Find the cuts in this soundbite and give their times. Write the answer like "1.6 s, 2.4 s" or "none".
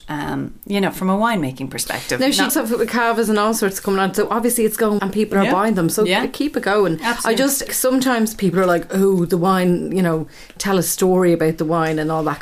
2.5 s, 5.0 s, 7.7 s